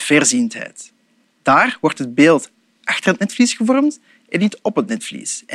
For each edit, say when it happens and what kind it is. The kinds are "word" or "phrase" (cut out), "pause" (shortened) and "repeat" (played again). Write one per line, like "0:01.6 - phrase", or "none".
none